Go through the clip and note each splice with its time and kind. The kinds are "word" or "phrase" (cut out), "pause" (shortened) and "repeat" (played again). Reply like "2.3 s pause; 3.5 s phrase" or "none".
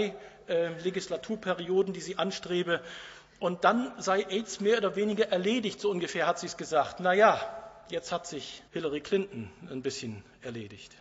8.7 s pause